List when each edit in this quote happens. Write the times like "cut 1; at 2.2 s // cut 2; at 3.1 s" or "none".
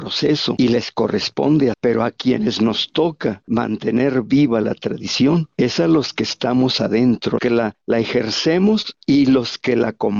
cut 1; at 1.7 s // cut 2; at 7.4 s